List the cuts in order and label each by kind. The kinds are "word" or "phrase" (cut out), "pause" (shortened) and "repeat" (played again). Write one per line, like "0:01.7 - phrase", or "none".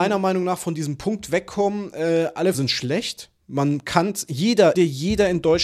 0:02.5 - word
0:04.7 - phrase

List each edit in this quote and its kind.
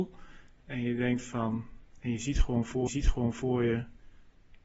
0:02.9 - repeat

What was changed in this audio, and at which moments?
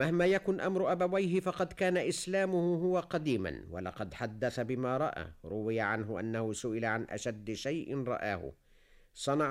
none

